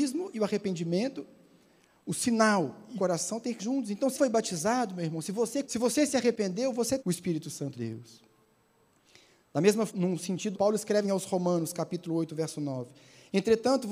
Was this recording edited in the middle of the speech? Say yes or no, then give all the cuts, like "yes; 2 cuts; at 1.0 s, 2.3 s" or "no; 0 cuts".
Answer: yes; 9 cuts; at 3.0 s, 3.6 s, 4.1 s, 5.6 s, 7.0 s, 7.7 s, 9.9 s, 10.5 s, 11.0 s